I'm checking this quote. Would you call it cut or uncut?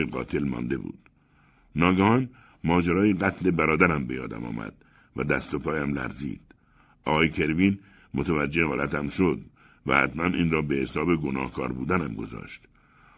uncut